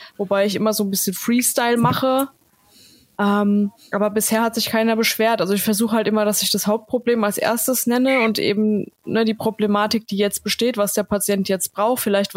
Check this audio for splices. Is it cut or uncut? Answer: uncut